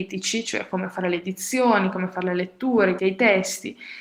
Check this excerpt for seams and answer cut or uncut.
cut